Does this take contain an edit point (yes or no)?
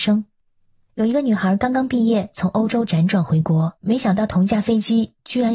yes